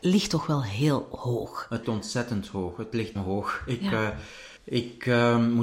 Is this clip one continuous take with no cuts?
no; 3 cuts; at 1.8 s, 3.2 s, 4.6 s

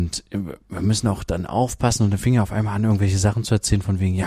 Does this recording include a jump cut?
no; 0 cuts

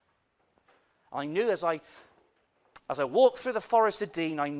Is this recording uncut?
yes; 0 cuts

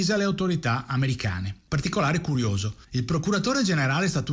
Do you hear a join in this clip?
yes; 1 cut; at 2.8 s

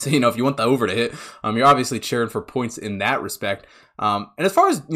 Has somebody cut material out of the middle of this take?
no; 0 cuts

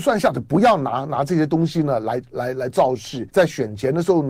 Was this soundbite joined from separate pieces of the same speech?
yes; 1 cut; at 3.3 s

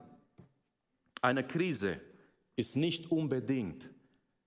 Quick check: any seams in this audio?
no; 0 cuts

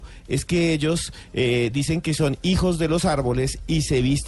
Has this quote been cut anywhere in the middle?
no; 0 cuts

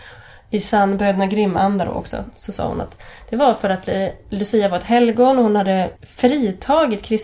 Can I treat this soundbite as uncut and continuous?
no; 1 cut; at 6.0 s

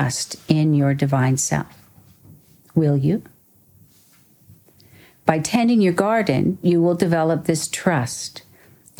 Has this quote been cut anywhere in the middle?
no; 0 cuts

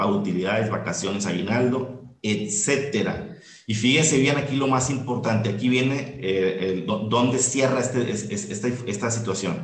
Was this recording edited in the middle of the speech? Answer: no; 0 cuts

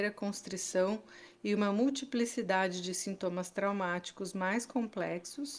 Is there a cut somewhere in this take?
no; 0 cuts

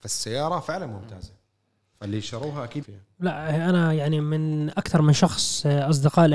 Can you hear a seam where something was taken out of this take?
yes; 1 cut; at 2.8 s

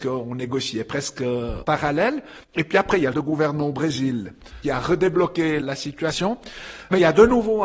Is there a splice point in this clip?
yes; 4 cuts; at 1.6 s, 2.4 s, 3.1 s, 4.6 s

